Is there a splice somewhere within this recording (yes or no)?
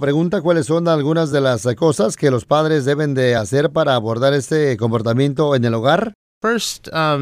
no